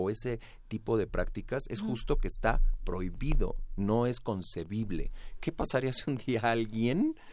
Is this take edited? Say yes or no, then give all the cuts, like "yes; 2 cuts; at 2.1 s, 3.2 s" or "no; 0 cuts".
no; 0 cuts